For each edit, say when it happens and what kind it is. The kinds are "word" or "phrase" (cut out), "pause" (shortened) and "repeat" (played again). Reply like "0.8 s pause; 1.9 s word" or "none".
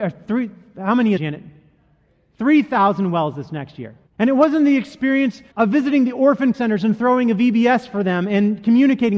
1.2 s phrase; 4.1 s pause; 5.5 s word; 6.5 s word